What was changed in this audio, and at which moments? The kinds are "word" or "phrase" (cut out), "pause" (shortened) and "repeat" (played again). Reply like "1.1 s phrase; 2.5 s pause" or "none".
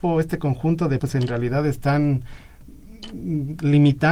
1.0 s word